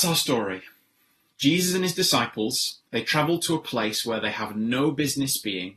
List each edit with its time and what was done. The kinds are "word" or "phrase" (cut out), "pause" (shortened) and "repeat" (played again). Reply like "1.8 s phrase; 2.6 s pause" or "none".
2.9 s pause

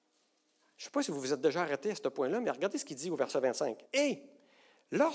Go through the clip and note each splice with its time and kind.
3.9 s pause

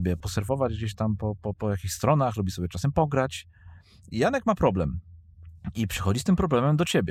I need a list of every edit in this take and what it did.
none

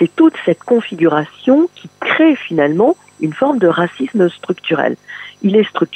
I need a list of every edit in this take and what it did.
none

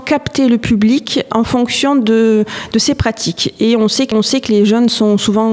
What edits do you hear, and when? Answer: 1.3 s word; 4.1 s repeat

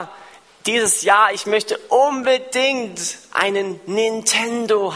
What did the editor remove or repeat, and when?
none

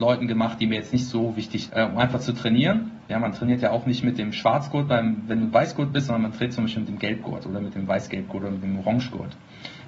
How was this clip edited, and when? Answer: 1.7 s word

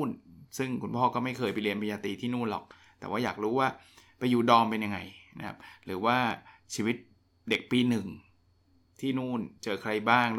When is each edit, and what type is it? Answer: none

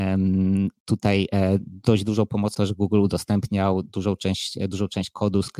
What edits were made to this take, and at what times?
2.5 s word

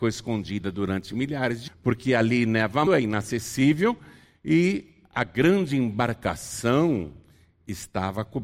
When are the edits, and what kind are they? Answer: 1.7 s word; 2.9 s phrase

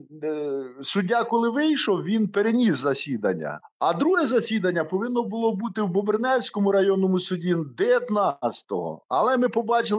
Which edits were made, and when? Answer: none

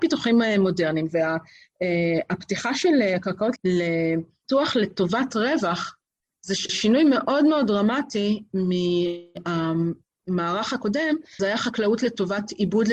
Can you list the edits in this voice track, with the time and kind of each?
3.6 s word; 6.7 s word; 11.4 s word

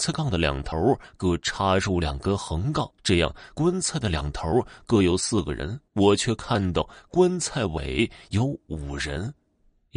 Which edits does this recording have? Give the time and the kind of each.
3.0 s pause; 5.9 s pause

